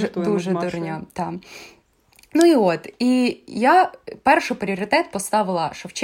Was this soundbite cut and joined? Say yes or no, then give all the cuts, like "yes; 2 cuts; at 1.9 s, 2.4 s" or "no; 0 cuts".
no; 0 cuts